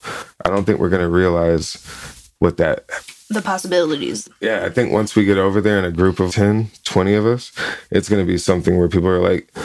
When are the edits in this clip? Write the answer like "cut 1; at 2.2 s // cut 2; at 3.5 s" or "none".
cut 1; at 6.3 s